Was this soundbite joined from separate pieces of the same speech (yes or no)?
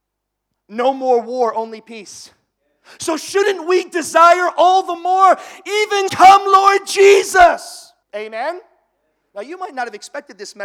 yes